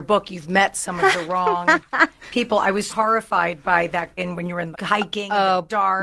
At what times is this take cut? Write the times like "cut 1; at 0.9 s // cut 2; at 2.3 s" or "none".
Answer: cut 1; at 2.9 s // cut 2; at 4.2 s // cut 3; at 4.7 s